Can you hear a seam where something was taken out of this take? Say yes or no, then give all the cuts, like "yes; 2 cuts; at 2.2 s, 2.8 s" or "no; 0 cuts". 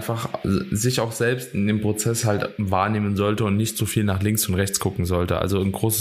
no; 0 cuts